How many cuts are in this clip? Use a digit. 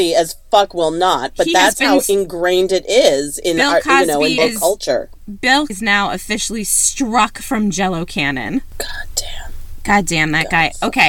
2